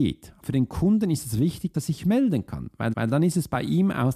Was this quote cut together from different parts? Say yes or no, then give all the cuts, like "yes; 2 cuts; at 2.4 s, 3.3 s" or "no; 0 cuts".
yes; 2 cuts; at 1.7 s, 2.9 s